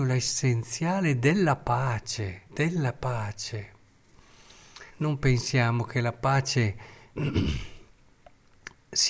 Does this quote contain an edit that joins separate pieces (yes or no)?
yes